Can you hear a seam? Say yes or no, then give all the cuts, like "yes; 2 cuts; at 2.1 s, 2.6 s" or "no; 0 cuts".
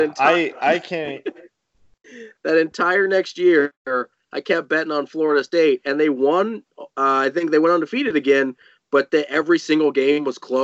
no; 0 cuts